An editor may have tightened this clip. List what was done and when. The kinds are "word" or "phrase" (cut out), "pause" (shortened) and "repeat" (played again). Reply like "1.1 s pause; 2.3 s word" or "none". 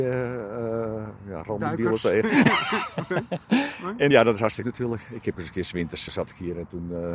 4.1 s word; 4.6 s word; 5.3 s phrase; 6.1 s word

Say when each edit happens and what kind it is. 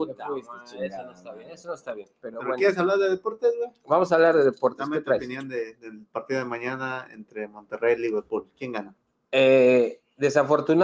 none

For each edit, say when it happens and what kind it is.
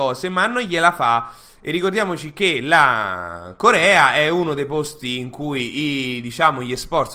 none

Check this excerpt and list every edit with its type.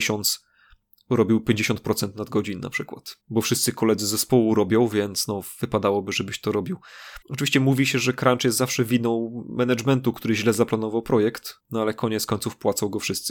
3.2 s pause; 7.2 s pause; 11.6 s pause

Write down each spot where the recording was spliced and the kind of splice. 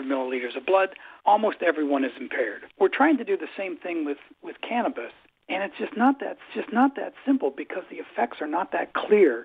1.2 s pause; 2.7 s pause; 6.5 s repeat

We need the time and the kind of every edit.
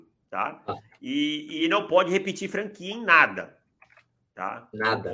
none

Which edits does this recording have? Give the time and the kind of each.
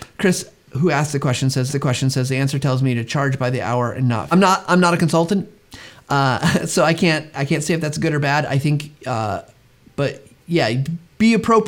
1.7 s repeat; 4.3 s phrase; 9.0 s pause

